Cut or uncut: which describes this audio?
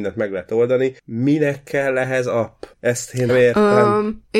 cut